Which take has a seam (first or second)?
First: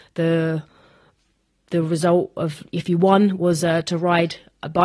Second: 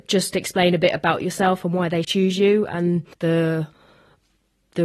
second